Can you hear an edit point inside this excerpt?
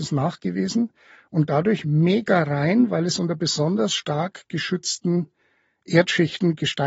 no; 0 cuts

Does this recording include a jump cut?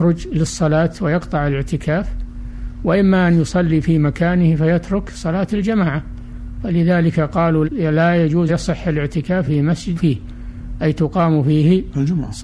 yes; 4 cuts; at 7.6 s, 8.5 s, 9.4 s, 9.9 s

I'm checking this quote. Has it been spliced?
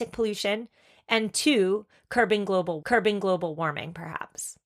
yes; 1 cut; at 2.8 s

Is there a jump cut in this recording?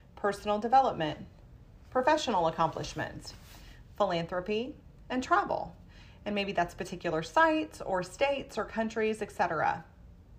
no; 0 cuts

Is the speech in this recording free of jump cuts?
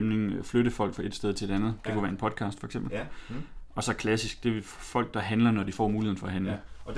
yes; 0 cuts

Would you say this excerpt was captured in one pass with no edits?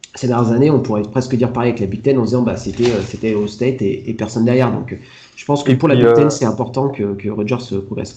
yes; 0 cuts

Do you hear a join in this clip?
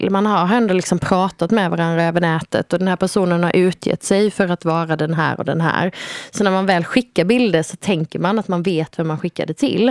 no; 0 cuts

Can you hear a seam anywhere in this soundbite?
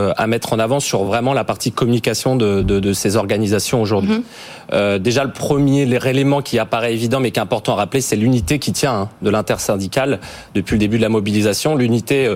no; 0 cuts

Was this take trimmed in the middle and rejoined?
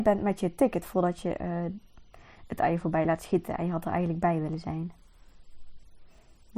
no; 0 cuts

